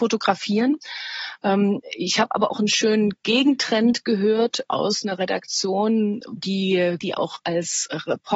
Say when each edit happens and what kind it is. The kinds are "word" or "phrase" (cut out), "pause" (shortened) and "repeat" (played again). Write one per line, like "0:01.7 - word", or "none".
0:04.6 - word
0:06.4 - word
0:07.0 - word